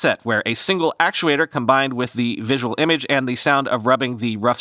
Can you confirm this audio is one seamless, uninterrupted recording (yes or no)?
yes